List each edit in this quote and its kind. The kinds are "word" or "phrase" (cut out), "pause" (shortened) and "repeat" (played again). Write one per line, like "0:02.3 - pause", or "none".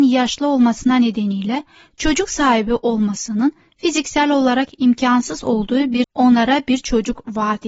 0:06.0 - word